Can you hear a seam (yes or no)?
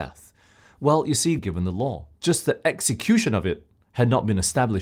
yes